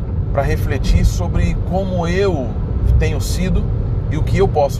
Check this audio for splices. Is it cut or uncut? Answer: uncut